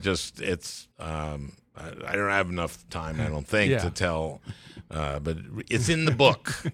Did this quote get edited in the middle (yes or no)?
yes